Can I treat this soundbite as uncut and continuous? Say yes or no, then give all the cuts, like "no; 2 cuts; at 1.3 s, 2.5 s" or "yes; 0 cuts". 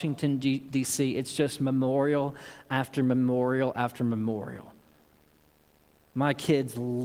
yes; 0 cuts